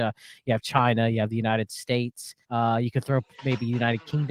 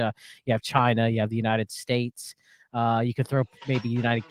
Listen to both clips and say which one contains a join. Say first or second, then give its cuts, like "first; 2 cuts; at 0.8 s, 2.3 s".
first; 1 cut; at 2.4 s